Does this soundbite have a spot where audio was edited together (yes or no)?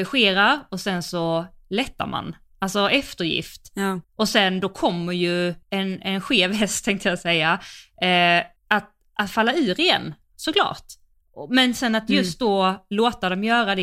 yes